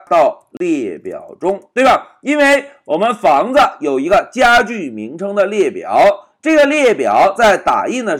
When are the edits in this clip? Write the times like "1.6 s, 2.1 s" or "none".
none